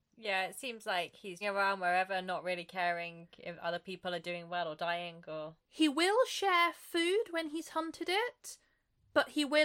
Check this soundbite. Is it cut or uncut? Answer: cut